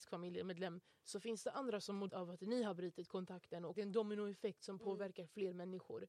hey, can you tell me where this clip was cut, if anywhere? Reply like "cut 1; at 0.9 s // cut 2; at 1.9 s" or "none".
cut 1; at 2.1 s // cut 2; at 3.7 s